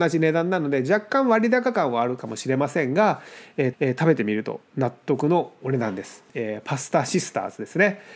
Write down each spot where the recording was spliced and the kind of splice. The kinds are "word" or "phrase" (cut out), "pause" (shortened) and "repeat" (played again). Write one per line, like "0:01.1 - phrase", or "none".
0:03.7 - repeat
0:06.3 - pause